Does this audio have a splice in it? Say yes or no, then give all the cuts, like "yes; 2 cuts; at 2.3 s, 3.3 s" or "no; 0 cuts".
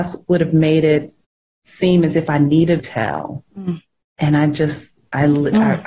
yes; 2 cuts; at 2.8 s, 3.5 s